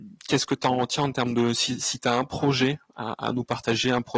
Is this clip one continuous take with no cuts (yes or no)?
yes